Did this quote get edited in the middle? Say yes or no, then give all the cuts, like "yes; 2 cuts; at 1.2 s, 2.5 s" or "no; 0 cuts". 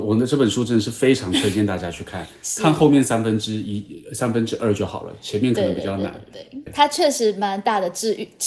yes; 1 cut; at 6.7 s